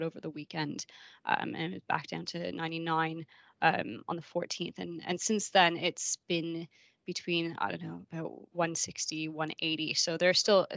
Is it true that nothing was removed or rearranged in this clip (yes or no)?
yes